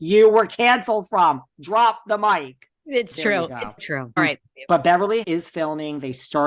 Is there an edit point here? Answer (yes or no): yes